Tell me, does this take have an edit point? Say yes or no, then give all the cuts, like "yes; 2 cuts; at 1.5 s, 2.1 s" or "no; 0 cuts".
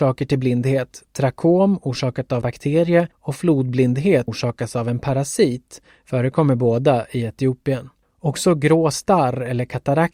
yes; 4 cuts; at 2.4 s, 3.1 s, 4.3 s, 8.0 s